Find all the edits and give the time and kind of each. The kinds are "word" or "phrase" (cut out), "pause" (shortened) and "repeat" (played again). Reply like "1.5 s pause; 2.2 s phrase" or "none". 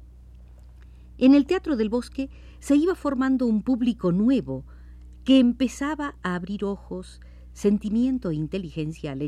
none